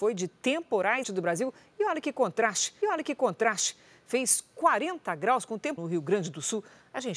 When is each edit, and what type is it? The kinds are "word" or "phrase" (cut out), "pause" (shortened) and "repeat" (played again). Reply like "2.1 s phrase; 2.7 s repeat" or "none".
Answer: 1.0 s phrase; 2.8 s repeat; 5.8 s phrase